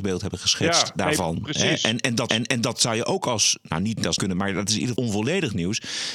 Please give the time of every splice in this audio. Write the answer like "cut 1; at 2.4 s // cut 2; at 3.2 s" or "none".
cut 1; at 2.3 s // cut 2; at 4.2 s // cut 3; at 4.9 s